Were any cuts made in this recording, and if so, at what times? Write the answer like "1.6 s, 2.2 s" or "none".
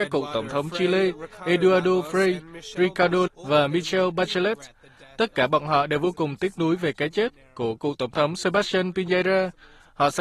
3.3 s